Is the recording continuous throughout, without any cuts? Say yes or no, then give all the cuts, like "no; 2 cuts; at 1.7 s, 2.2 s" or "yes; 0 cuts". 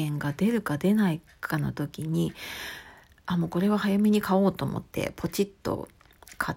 yes; 0 cuts